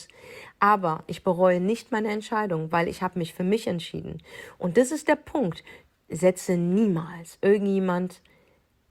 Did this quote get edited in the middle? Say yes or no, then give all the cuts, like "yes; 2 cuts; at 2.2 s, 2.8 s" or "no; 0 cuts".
no; 0 cuts